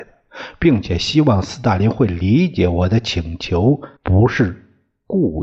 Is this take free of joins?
no; 1 cut; at 4.0 s

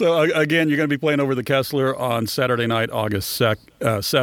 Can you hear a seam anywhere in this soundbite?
no; 0 cuts

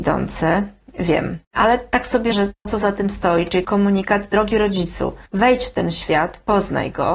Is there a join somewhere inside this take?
yes; 5 cuts; at 1.4 s, 2.3 s, 2.7 s, 3.6 s, 5.3 s

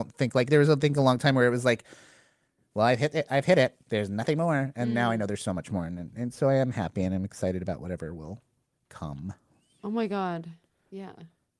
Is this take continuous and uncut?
yes; 0 cuts

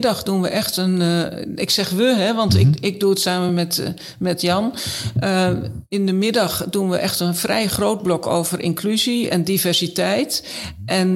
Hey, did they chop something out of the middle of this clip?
no; 0 cuts

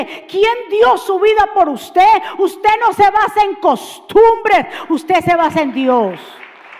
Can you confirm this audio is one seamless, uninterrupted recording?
yes; 0 cuts

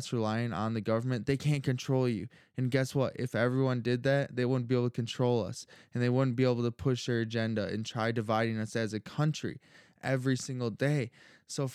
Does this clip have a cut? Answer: no; 0 cuts

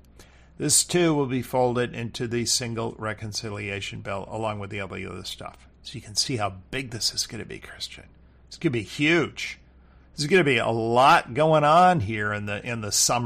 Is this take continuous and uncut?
yes; 0 cuts

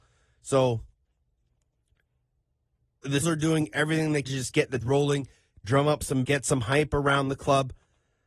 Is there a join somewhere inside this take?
yes; 4 cuts; at 3.2 s, 4.2 s, 4.8 s, 6.2 s

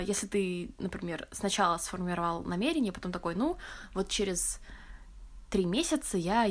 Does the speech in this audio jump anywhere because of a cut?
no; 0 cuts

